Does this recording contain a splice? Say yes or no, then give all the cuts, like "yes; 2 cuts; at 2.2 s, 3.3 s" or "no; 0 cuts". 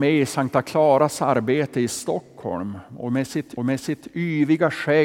yes; 1 cut; at 3.6 s